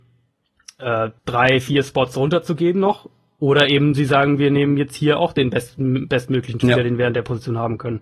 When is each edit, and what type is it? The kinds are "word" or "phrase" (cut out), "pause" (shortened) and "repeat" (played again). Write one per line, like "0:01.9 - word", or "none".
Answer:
0:01.2 - pause